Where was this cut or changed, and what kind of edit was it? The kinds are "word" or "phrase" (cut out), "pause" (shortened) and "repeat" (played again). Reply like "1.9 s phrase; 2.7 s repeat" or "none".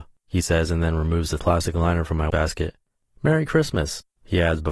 1.4 s word; 2.3 s word